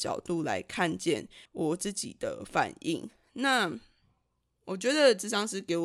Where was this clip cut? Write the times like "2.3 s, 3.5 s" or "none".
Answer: 1.5 s